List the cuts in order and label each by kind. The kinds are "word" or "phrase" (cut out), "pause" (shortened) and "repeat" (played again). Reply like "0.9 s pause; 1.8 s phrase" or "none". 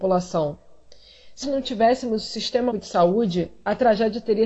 1.4 s word; 2.7 s word

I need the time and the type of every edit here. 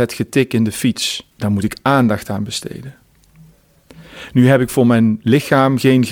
1.3 s pause

